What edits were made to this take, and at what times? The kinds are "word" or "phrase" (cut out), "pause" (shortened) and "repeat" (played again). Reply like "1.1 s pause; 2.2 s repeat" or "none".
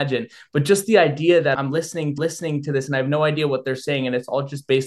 1.5 s word; 2.2 s repeat